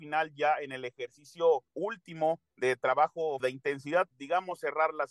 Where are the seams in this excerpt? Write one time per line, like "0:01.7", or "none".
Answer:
0:01.7
0:03.4
0:04.1

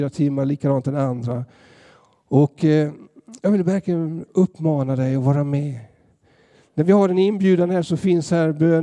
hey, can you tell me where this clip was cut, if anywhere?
none

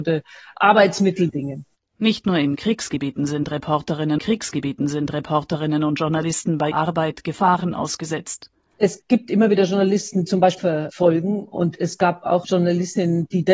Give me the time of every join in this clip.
0:01.3
0:04.2
0:06.7
0:10.3
0:10.6
0:12.4

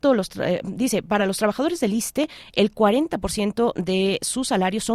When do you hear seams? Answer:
none

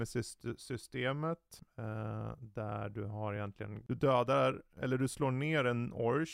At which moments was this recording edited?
none

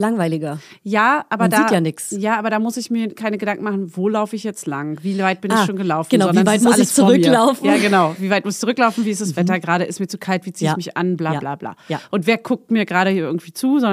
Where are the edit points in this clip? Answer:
none

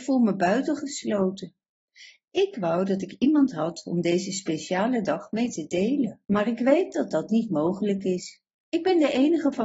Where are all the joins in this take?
0:06.2

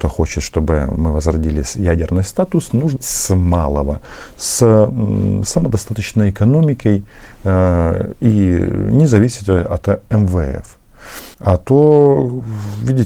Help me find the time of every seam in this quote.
0:03.0
0:11.3

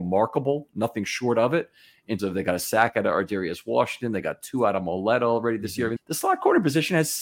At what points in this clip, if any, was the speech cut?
0:02.2
0:06.0

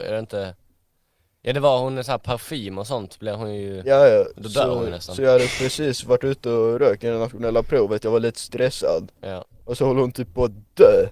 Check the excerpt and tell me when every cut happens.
0:09.5

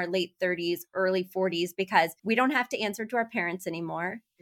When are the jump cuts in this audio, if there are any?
0:02.2

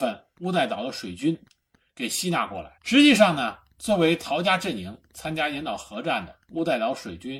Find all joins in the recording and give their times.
0:02.8

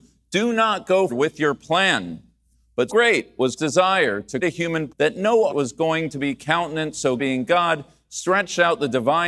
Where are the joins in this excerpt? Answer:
0:01.1
0:02.9
0:03.6
0:04.4
0:04.9
0:05.5
0:07.2

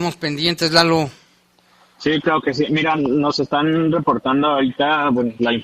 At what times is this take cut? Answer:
none

